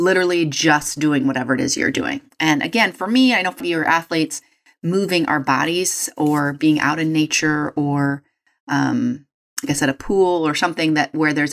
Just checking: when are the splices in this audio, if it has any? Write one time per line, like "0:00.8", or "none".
0:03.6